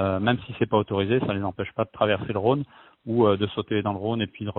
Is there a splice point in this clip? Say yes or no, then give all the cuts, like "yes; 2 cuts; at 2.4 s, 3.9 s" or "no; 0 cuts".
no; 0 cuts